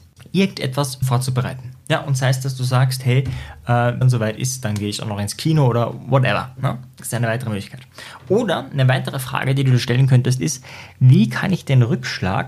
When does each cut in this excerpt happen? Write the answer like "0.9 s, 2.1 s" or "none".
1.0 s, 4.0 s